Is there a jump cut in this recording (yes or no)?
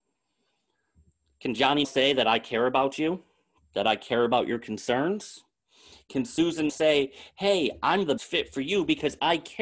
yes